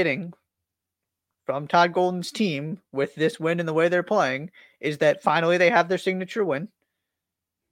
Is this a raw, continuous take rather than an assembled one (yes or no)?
yes